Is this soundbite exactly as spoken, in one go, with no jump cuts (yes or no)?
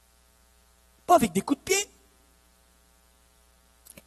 yes